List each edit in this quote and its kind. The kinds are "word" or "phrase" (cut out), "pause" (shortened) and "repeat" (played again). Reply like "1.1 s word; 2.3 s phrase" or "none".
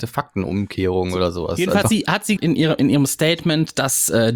1.8 s word; 2.4 s word